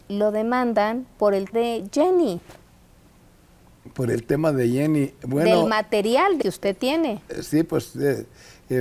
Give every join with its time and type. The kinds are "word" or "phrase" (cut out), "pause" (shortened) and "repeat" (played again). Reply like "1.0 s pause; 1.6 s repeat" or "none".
1.5 s word; 6.4 s phrase